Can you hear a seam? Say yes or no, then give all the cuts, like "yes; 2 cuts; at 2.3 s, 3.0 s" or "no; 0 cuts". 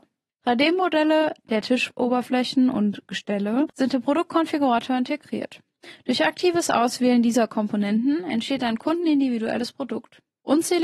no; 0 cuts